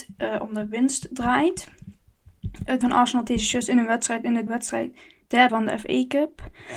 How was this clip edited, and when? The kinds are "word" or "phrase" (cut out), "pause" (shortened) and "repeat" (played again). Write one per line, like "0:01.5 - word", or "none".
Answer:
0:02.8 - word
0:03.3 - word
0:04.5 - word
0:05.5 - word